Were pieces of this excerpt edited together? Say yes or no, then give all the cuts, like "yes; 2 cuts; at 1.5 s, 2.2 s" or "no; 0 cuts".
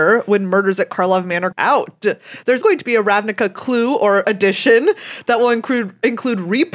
yes; 3 cuts; at 1.5 s, 2.6 s, 4.2 s